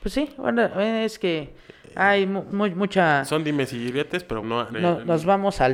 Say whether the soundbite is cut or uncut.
cut